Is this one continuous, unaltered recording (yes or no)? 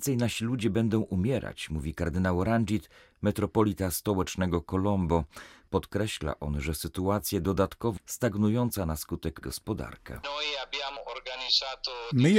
no